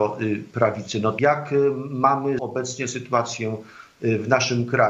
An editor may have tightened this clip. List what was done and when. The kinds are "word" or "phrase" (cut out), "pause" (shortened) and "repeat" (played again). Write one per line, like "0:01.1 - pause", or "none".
0:01.2 - phrase
0:02.4 - word